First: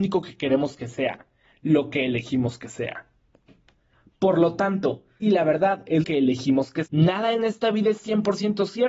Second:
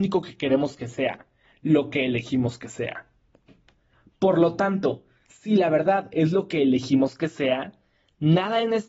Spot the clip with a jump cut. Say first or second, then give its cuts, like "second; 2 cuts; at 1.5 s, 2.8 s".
first; 3 cuts; at 5.2 s, 6.0 s, 6.9 s